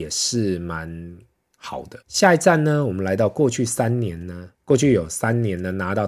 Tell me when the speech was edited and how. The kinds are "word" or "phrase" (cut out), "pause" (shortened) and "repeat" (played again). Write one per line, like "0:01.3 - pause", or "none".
0:02.0 - pause
0:04.5 - pause